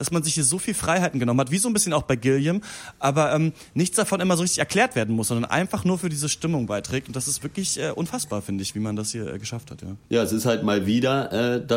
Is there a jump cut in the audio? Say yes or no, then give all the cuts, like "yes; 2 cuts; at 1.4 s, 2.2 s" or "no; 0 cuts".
no; 0 cuts